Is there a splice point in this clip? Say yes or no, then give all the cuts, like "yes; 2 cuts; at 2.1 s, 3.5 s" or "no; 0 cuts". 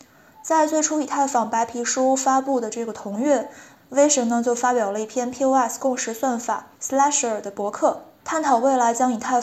no; 0 cuts